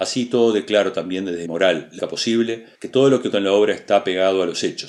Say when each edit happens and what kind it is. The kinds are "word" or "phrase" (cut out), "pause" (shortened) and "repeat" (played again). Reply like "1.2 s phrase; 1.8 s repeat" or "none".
1.5 s word; 2.0 s word; 2.7 s pause; 3.3 s word